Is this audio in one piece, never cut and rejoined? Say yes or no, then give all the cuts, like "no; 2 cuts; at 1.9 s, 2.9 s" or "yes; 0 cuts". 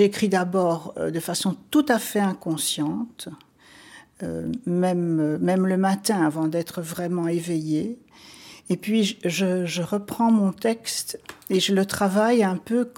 yes; 0 cuts